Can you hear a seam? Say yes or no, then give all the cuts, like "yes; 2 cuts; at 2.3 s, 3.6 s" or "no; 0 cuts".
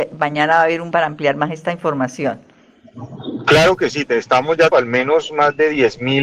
yes; 2 cuts; at 0.9 s, 4.7 s